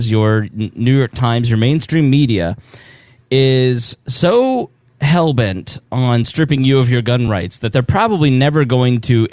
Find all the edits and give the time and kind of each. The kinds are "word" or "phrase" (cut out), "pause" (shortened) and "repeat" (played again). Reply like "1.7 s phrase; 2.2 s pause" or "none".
none